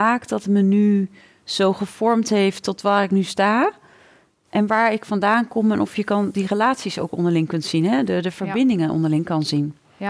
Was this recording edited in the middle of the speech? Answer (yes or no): no